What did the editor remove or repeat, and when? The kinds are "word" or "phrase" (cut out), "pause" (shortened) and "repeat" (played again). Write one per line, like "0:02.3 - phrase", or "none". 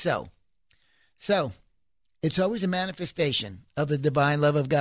none